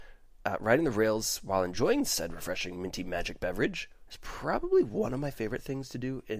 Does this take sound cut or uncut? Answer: uncut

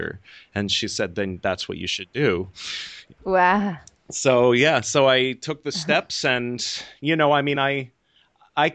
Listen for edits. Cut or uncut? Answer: uncut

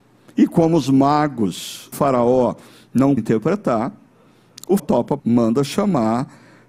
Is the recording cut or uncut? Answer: cut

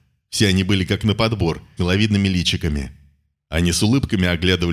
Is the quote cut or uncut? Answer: cut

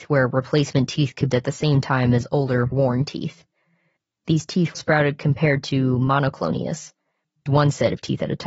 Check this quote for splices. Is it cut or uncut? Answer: cut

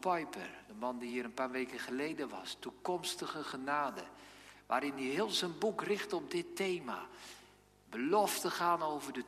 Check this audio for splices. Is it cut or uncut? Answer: uncut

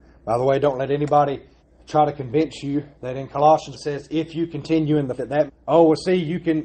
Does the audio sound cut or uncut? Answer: cut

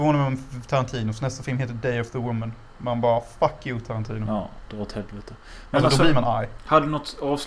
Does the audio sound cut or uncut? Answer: uncut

